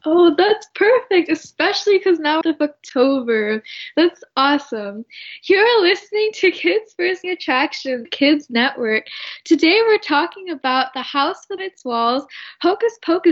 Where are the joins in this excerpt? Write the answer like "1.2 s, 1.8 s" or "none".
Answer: 2.4 s, 7.2 s, 8.0 s, 11.6 s